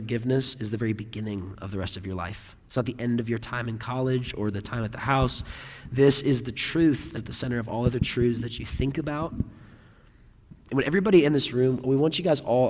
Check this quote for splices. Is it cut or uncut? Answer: cut